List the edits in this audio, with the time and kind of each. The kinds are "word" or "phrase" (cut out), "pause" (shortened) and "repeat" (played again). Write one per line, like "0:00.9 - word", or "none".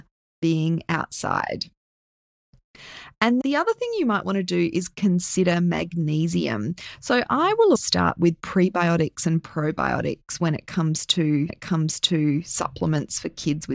0:03.4 - word
0:07.8 - word
0:11.5 - repeat